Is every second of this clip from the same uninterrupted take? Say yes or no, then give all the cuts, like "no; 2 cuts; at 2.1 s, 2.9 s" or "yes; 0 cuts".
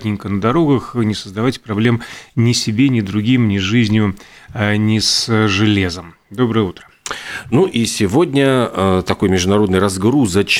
yes; 0 cuts